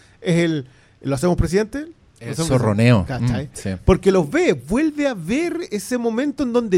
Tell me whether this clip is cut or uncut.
uncut